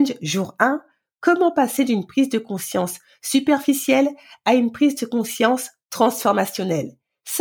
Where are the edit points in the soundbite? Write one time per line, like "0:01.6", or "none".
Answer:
none